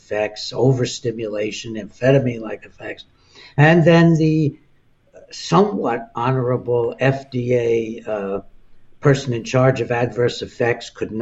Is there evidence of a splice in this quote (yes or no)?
no